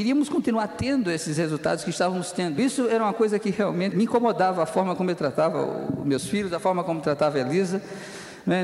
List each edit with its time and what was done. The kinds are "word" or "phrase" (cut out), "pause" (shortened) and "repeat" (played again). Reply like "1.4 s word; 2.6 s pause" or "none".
3.9 s phrase

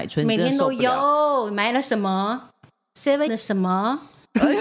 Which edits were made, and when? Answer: 3.3 s word

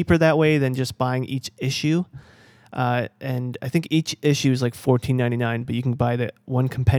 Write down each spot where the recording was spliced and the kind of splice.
none

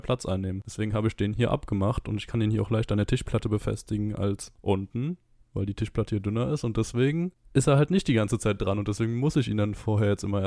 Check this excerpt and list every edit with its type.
none

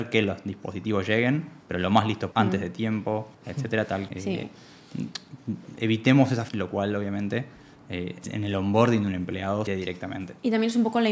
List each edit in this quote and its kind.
1.6 s pause; 2.3 s word; 3.3 s pause; 4.1 s word; 6.5 s word; 8.2 s word; 9.7 s phrase

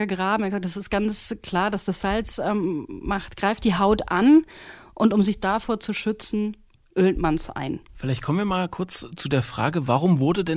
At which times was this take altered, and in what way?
7.9 s pause

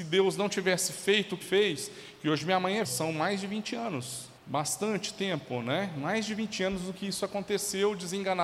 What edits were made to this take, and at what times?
1.4 s word; 2.8 s word; 4.4 s pause

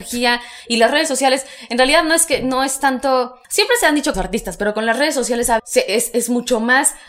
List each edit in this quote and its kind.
3.4 s pause; 4.1 s phrase; 5.6 s word

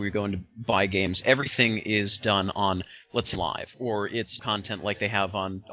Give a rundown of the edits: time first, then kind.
1.2 s word; 3.4 s word; 4.4 s word

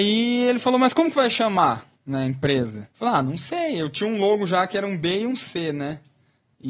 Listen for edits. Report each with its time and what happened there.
1.9 s pause; 2.9 s pause

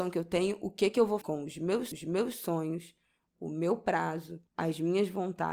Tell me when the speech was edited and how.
1.2 s word; 1.9 s repeat; 4.5 s pause

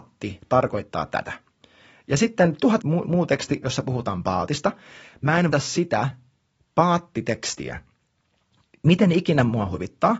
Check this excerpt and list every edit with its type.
2.8 s phrase; 5.5 s phrase

